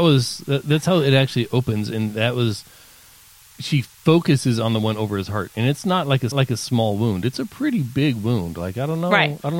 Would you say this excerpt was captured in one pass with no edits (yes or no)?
no